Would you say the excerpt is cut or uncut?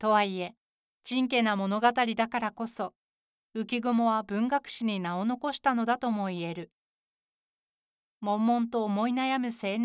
uncut